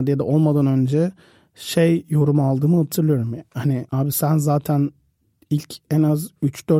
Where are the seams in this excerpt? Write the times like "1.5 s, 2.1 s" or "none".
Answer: none